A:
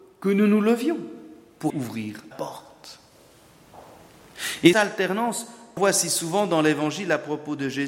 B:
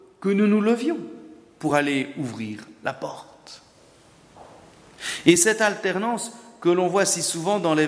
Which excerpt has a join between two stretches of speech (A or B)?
A